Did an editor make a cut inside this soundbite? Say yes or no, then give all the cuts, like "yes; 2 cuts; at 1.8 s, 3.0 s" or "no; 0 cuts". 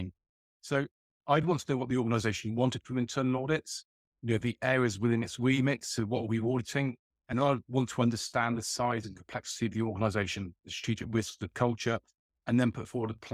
no; 0 cuts